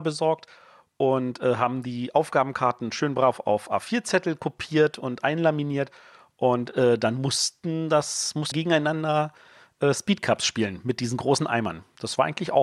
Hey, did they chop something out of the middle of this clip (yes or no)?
yes